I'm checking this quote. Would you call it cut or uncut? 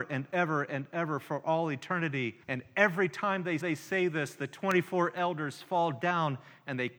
cut